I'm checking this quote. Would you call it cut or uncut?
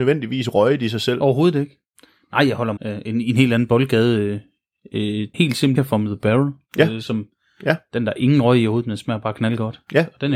cut